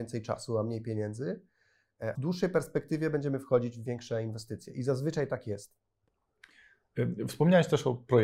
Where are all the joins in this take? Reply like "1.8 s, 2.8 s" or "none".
2.2 s